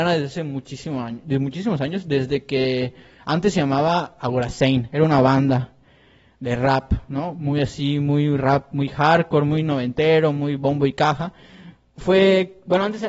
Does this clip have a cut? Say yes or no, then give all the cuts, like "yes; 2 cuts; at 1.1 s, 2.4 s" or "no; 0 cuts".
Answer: no; 0 cuts